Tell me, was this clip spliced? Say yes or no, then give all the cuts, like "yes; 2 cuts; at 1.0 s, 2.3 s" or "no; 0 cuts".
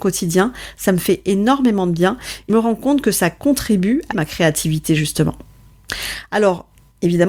yes; 2 cuts; at 2.5 s, 4.1 s